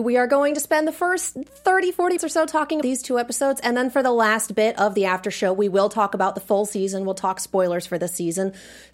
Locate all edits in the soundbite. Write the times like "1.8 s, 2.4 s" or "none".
2.2 s, 2.8 s